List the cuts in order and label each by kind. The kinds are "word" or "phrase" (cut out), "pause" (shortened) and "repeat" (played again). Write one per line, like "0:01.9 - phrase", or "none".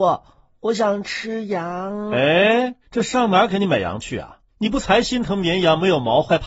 0:02.8 - pause
0:04.5 - pause